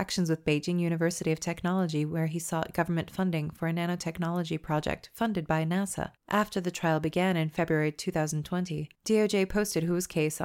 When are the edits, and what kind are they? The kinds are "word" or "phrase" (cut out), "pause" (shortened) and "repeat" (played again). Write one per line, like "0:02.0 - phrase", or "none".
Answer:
0:06.2 - pause
0:08.9 - pause